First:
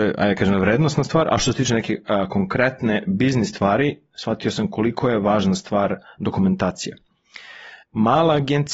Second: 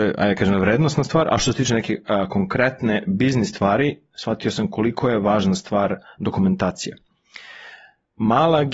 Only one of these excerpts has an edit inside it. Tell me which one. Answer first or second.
first